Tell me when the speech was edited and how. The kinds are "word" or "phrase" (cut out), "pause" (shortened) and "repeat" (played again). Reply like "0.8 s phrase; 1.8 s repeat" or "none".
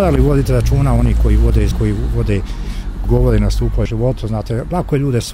1.7 s word; 3.1 s word; 3.9 s word